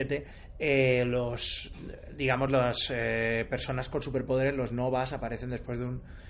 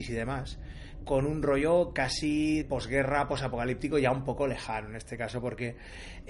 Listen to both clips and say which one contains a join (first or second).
second